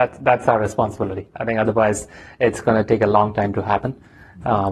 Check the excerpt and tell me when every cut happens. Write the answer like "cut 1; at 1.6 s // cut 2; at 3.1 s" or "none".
none